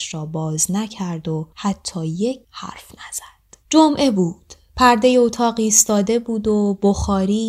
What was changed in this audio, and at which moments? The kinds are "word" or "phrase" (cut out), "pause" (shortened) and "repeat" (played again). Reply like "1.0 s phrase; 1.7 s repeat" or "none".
1.5 s pause; 2.4 s word; 3.6 s pause